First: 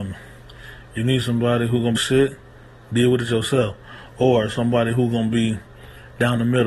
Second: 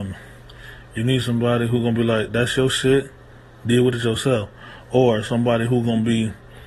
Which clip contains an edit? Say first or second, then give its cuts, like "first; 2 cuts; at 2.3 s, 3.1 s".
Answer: first; 1 cut; at 2.0 s